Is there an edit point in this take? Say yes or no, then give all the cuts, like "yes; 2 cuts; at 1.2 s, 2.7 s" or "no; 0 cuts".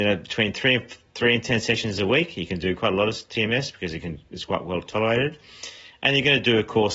no; 0 cuts